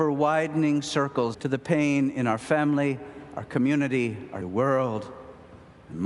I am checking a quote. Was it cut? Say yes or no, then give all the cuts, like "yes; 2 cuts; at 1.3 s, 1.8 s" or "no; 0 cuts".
yes; 2 cuts; at 1.3 s, 4.4 s